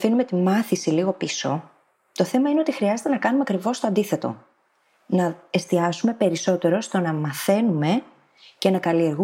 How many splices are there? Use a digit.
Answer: 0